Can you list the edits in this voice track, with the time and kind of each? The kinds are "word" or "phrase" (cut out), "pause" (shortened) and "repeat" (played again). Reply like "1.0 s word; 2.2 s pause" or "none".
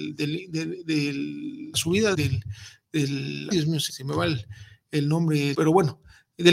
1.7 s word; 2.1 s word; 3.5 s word; 3.9 s word; 5.5 s word